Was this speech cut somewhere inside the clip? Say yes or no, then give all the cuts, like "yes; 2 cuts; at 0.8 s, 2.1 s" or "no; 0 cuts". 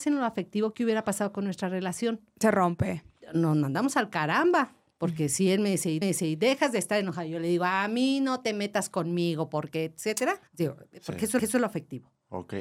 yes; 3 cuts; at 6.0 s, 10.5 s, 11.4 s